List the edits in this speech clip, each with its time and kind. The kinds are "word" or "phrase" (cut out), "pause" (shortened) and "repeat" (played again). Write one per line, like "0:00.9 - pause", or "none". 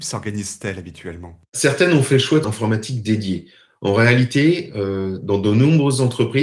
0:02.4 - word